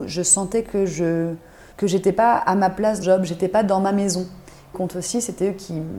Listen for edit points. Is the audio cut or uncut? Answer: cut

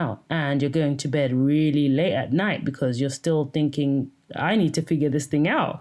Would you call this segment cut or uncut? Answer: uncut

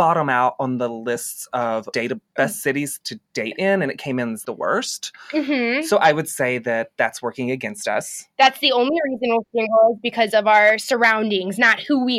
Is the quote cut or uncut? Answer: cut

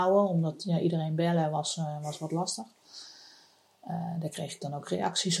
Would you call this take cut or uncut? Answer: uncut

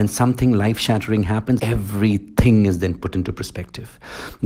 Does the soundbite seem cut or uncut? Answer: cut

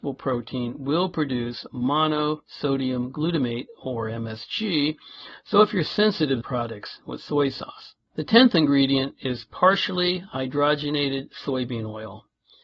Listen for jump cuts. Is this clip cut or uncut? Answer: cut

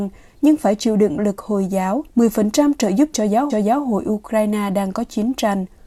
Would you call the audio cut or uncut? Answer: cut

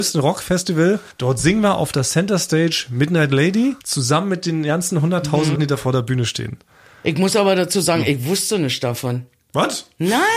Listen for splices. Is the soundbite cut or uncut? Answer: cut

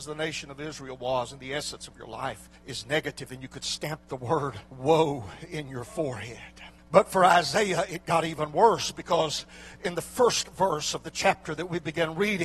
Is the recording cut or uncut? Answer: cut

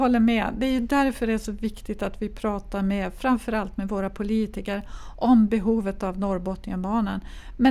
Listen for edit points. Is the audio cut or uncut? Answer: uncut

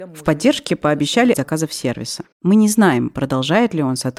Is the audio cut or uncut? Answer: cut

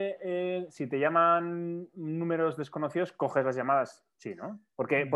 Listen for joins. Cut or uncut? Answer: uncut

